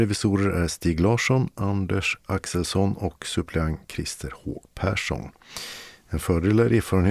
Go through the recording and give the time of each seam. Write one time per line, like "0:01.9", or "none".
none